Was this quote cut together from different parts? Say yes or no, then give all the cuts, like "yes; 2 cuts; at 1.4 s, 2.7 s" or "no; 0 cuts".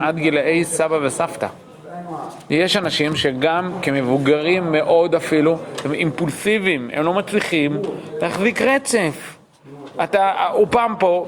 no; 0 cuts